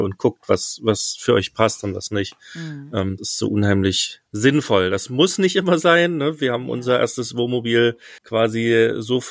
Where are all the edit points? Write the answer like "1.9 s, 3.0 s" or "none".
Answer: 3.2 s, 4.3 s, 8.2 s